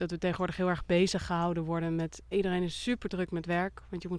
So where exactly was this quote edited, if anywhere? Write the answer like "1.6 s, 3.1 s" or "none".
2.3 s